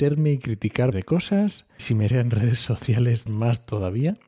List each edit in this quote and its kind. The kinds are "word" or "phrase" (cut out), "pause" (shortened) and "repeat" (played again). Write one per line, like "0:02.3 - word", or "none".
0:00.9 - word
0:01.8 - word
0:02.1 - word
0:03.3 - word